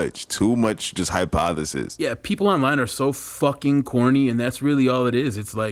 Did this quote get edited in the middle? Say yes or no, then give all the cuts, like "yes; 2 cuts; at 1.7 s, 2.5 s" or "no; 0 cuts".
no; 0 cuts